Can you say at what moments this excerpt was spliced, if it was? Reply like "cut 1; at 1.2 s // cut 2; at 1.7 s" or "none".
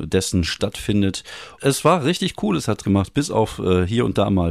cut 1; at 1.6 s // cut 2; at 2.8 s